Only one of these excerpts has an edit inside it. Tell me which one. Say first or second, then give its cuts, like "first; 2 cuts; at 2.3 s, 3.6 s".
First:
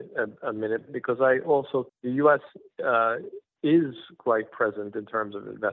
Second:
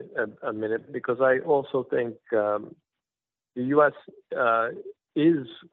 first; 1 cut; at 1.9 s